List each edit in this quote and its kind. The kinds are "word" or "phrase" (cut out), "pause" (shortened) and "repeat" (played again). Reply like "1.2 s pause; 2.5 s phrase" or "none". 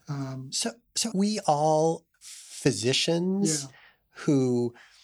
1.1 s phrase; 2.1 s word